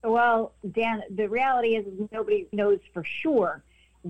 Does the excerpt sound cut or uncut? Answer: cut